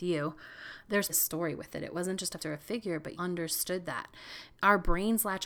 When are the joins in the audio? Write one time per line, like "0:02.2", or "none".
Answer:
0:01.1
0:02.4
0:03.2